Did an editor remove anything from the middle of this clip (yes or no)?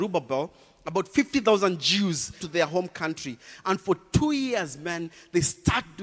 yes